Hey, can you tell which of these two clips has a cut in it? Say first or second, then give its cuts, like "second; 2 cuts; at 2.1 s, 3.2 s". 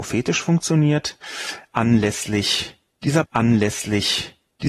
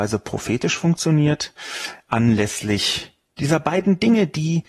first; 1 cut; at 3.2 s